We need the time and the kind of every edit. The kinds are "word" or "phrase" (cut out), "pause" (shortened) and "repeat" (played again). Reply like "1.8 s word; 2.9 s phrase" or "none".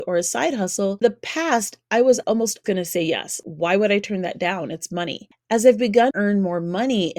1.0 s word; 2.2 s word; 2.6 s word; 6.1 s word